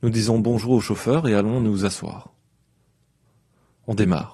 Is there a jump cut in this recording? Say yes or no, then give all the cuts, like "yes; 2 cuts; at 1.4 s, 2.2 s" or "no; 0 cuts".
no; 0 cuts